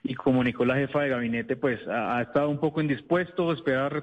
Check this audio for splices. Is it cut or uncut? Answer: uncut